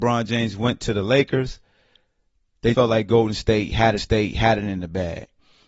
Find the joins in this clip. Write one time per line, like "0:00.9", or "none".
0:02.7
0:04.0

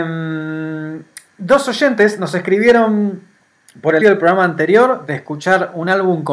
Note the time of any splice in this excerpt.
0:04.0

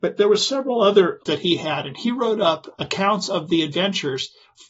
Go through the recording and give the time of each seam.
0:01.3

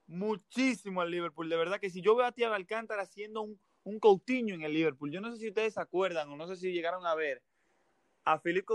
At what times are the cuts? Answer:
none

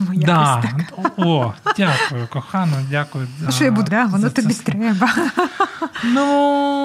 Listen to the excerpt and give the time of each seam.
0:03.5
0:03.9

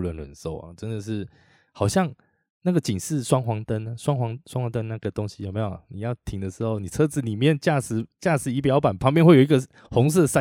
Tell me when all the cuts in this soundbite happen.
none

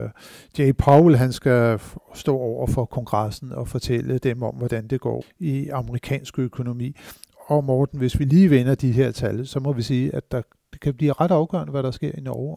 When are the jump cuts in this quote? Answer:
0:05.2

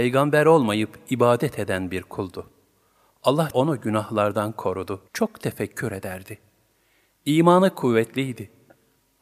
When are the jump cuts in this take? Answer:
0:03.5
0:05.1

